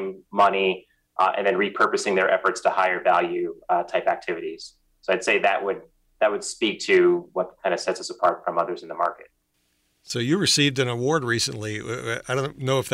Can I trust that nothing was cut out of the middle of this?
yes; 0 cuts

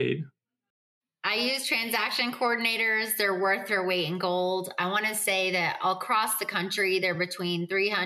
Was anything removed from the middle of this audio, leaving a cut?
no; 0 cuts

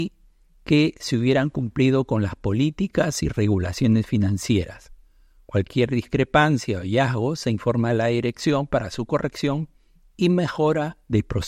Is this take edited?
no; 0 cuts

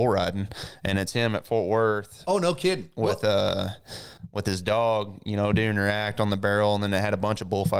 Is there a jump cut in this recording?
no; 0 cuts

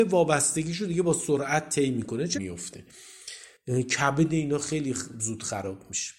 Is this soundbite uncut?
no; 1 cut; at 2.3 s

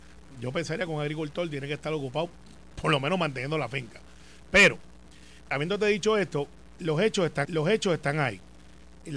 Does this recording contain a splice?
yes; 2 cuts; at 5.5 s, 7.4 s

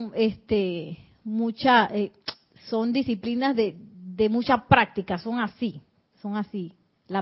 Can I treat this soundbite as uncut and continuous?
yes; 0 cuts

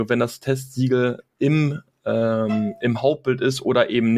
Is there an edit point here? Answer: no; 0 cuts

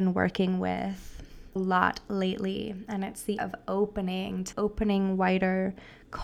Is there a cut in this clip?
yes; 3 cuts; at 1.6 s, 3.4 s, 4.5 s

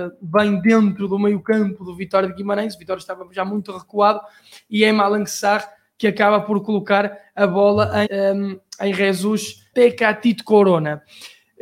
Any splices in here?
yes; 2 cuts; at 8.1 s, 9.7 s

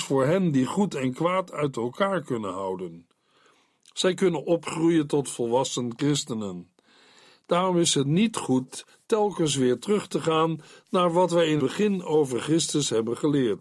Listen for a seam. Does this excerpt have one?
yes; 1 cut; at 11.6 s

